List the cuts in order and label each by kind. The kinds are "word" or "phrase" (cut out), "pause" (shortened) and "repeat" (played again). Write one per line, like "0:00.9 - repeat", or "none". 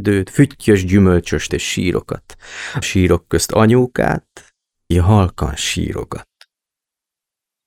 0:01.5 - word
0:02.8 - word
0:04.9 - word

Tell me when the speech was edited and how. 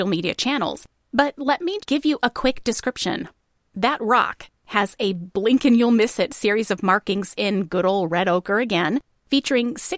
0:01.8 - word

